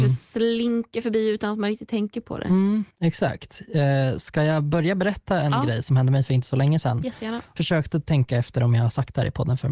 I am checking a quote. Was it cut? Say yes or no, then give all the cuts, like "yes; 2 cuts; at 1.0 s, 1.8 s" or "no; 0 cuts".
yes; 2 cuts; at 2.9 s, 7.6 s